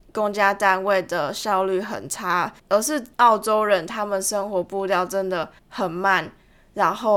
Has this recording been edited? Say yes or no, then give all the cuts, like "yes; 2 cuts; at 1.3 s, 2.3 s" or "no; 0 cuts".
yes; 3 cuts; at 2.6 s, 3.1 s, 5.6 s